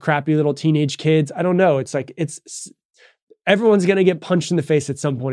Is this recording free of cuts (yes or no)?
yes